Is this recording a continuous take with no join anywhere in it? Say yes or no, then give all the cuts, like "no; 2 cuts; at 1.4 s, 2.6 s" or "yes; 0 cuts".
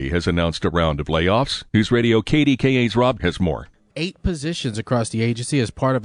no; 3 cuts; at 1.7 s, 3.2 s, 3.9 s